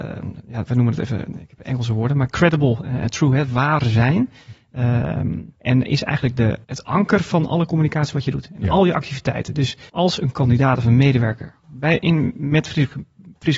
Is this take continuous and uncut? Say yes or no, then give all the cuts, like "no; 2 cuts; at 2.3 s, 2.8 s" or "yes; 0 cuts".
no; 4 cuts; at 5.6 s, 6.6 s, 9.9 s, 11.6 s